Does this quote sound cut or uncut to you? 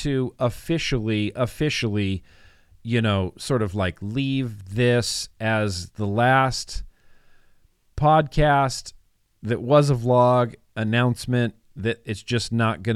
uncut